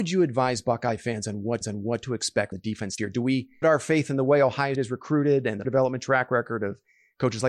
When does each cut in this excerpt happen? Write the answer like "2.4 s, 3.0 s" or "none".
1.6 s, 2.5 s, 3.0 s, 3.6 s, 4.7 s, 5.6 s